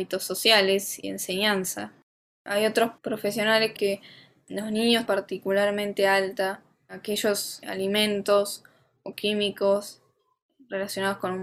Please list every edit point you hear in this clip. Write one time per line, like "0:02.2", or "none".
0:01.0
0:03.0
0:03.8
0:05.1
0:07.6
0:09.1